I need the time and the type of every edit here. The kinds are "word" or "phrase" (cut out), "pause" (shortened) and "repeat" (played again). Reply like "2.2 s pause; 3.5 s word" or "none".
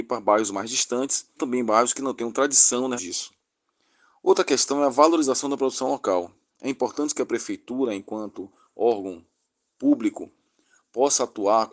1.4 s word; 3.0 s word